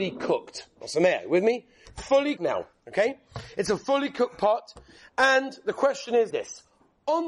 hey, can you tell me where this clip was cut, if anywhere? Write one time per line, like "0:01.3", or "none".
0:02.4
0:06.3